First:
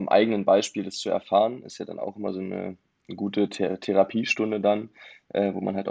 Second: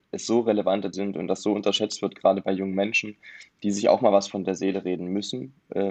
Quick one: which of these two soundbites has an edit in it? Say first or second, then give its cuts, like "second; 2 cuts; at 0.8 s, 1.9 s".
second; 1 cut; at 0.9 s